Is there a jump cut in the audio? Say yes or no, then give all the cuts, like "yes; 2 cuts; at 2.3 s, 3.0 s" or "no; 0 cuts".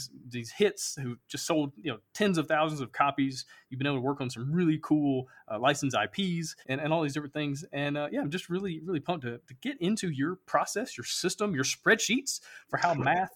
yes; 1 cut; at 6.6 s